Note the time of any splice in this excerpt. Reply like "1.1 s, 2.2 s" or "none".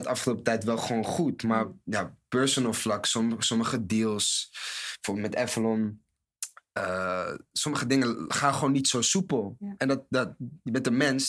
none